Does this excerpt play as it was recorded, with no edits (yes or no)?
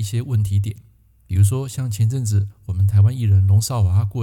yes